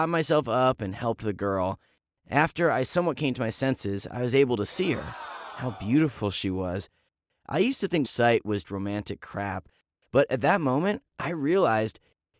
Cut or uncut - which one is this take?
cut